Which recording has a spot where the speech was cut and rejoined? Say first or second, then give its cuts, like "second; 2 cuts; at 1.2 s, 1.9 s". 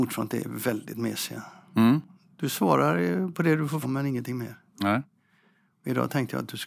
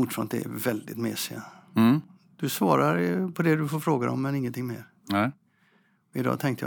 first; 1 cut; at 3.8 s